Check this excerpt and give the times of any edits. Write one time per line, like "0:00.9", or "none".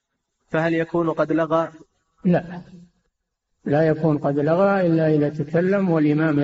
none